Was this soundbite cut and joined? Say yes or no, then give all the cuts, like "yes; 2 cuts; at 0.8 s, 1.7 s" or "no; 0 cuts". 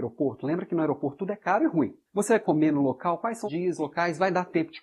yes; 3 cuts; at 2.1 s, 2.4 s, 3.5 s